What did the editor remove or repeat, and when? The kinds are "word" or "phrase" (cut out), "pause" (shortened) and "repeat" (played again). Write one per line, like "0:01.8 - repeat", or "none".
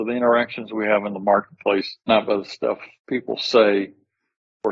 0:02.0 - pause
0:03.0 - pause

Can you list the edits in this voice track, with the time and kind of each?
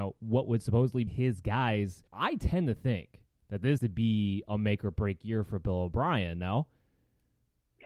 0:01.1 - word
0:02.1 - pause
0:03.8 - word

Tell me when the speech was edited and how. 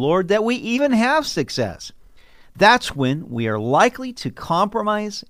none

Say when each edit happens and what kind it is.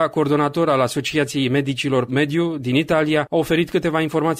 0:02.1 - word

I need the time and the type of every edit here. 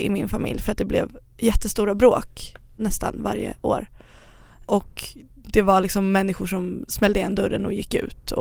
none

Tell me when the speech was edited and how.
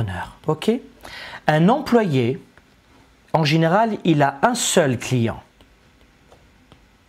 none

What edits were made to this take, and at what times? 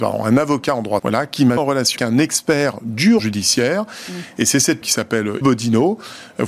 0:01.0 - word
0:01.6 - word
0:02.0 - word
0:03.2 - word
0:04.8 - word
0:05.4 - word

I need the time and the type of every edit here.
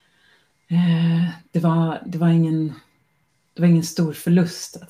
none

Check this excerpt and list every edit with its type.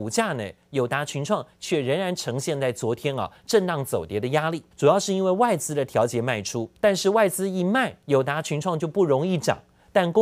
0:04.7 - pause
0:06.8 - pause
0:08.0 - pause

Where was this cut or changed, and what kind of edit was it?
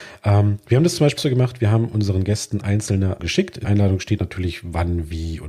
0:01.2 - word
0:02.6 - word
0:03.2 - word
0:03.6 - word
0:04.2 - word

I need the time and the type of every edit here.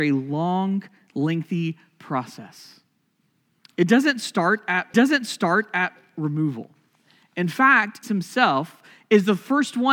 0:04.9 - repeat
0:08.0 - word

